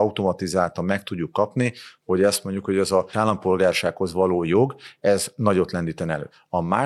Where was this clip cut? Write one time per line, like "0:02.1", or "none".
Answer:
0:03.1